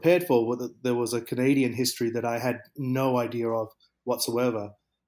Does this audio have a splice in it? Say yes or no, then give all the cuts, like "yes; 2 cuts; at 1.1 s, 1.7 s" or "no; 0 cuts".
no; 0 cuts